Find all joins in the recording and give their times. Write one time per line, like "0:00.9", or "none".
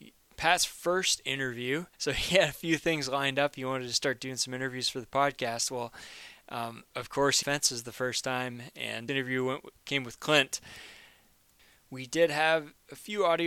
0:01.9
0:06.9
0:07.4
0:09.1